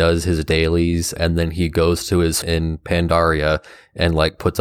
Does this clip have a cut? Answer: yes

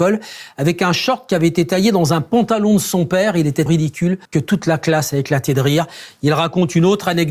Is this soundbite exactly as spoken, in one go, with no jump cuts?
no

